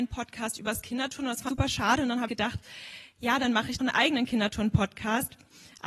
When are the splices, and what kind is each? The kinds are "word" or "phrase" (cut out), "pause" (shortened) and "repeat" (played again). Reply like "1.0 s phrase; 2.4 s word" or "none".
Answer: 1.5 s word; 2.3 s word; 3.8 s word

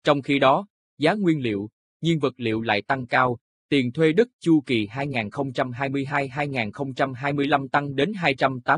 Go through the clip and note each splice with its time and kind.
none

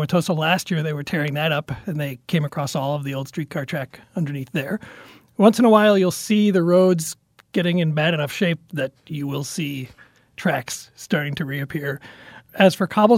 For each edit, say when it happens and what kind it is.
none

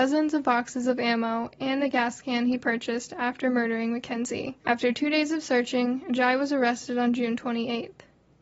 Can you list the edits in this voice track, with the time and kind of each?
4.6 s pause

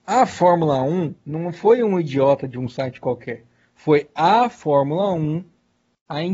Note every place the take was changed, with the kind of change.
none

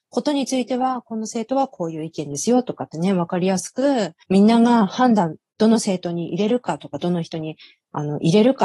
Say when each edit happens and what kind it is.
none

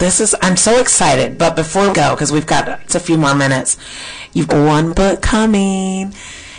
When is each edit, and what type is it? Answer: 1.9 s word; 2.9 s word; 4.5 s word; 4.9 s word

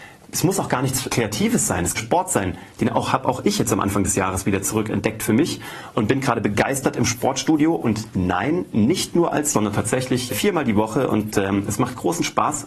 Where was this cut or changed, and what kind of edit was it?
1.1 s word; 2.0 s phrase; 9.5 s word; 10.3 s word

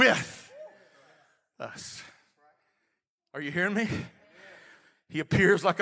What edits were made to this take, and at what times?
none

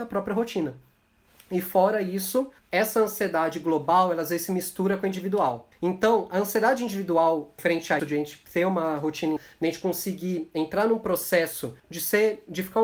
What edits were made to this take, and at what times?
2.6 s pause; 5.7 s pause; 7.6 s word; 8.0 s word; 9.4 s word; 11.8 s pause

